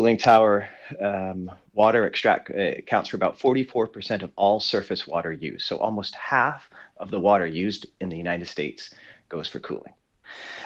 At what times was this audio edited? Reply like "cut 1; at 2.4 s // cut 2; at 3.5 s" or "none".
none